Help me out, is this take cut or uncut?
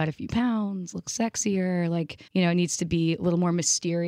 cut